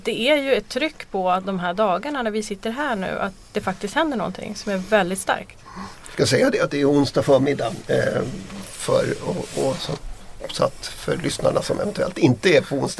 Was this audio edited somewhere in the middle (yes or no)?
no